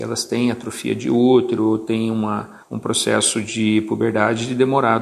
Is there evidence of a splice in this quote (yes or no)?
yes